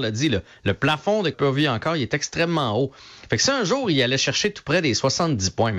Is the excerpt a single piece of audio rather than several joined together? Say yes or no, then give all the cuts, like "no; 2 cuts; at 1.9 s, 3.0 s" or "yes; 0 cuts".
no; 1 cut; at 1.3 s